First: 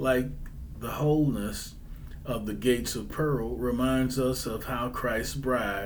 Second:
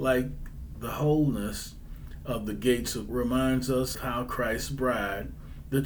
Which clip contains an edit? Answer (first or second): second